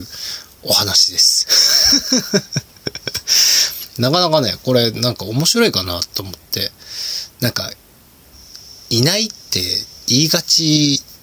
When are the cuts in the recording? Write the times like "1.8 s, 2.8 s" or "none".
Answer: 9.4 s